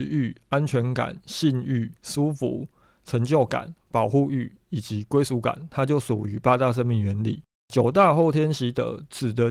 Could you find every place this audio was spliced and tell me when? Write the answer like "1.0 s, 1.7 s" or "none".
2.0 s